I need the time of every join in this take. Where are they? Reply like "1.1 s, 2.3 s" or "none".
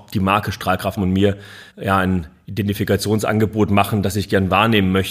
1.0 s, 1.7 s